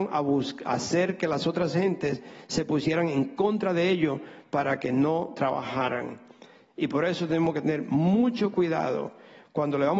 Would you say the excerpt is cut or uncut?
uncut